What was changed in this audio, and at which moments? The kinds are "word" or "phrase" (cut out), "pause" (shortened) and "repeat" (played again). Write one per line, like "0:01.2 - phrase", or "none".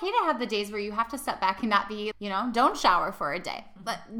0:02.1 - word